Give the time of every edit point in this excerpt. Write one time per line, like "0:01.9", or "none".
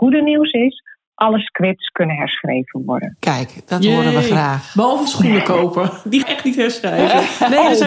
0:05.1
0:06.2